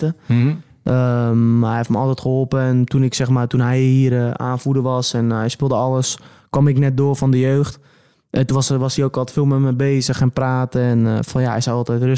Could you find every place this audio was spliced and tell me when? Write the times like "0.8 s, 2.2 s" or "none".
none

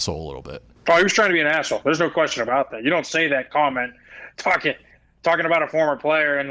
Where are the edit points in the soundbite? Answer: none

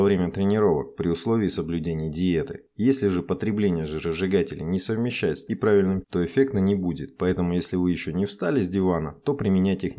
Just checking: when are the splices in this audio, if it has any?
5.5 s, 6.0 s

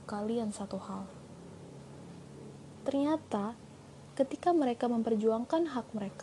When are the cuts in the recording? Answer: none

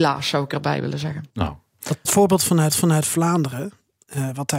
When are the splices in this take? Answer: 1.3 s, 2.0 s, 2.7 s

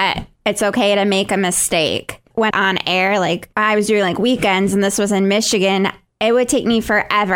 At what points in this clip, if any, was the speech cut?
2.5 s

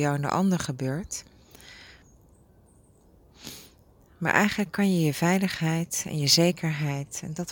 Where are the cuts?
none

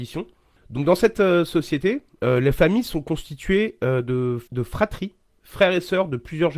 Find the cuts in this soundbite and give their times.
4.5 s

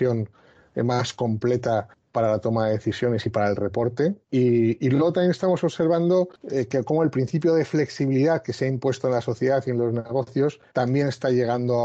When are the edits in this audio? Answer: 4.2 s, 10.7 s

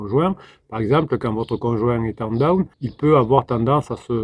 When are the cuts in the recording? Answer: 2.7 s

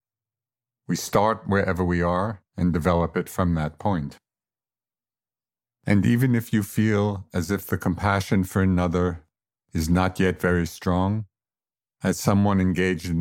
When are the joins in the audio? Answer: 2.5 s

